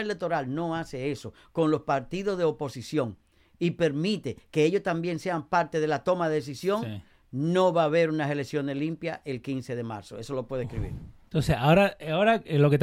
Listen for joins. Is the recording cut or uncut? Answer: uncut